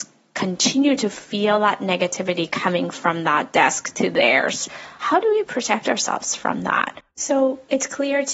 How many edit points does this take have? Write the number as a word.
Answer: two